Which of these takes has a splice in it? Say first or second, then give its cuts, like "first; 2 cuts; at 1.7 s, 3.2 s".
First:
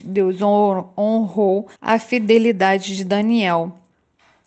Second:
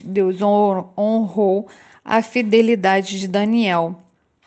first; 1 cut; at 1.7 s